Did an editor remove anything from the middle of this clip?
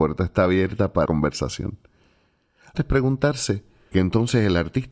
yes; 3 cuts; at 1.1 s, 2.7 s, 3.9 s

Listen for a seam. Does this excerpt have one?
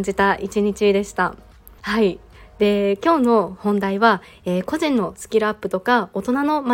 yes; 1 cut; at 1.8 s

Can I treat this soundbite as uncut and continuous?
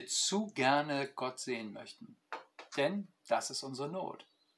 yes; 0 cuts

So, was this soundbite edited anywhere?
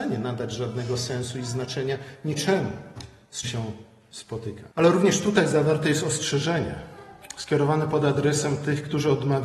yes; 2 cuts; at 3.4 s, 4.7 s

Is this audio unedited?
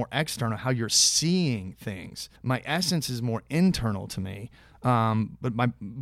no; 1 cut; at 2.4 s

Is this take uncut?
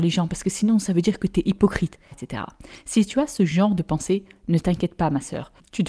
no; 1 cut; at 2.1 s

